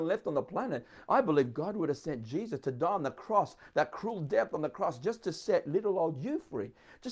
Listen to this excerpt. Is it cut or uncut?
uncut